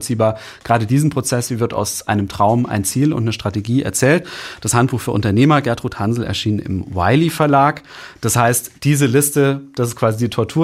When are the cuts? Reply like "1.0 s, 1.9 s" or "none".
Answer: none